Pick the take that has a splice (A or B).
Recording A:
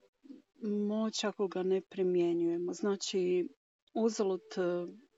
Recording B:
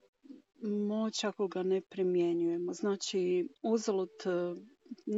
B